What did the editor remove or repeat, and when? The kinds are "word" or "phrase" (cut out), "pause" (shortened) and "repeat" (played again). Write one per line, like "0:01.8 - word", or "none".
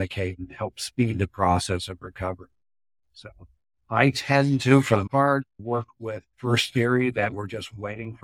0:05.1 - word
0:06.3 - word